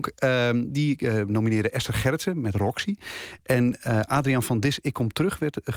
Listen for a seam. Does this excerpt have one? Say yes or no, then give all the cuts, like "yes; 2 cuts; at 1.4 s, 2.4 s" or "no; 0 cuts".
no; 0 cuts